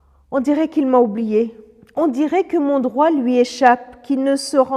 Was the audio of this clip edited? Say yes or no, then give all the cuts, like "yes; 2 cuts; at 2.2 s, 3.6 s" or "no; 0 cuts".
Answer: no; 0 cuts